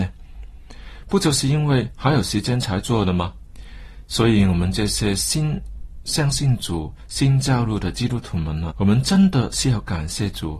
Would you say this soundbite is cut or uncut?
cut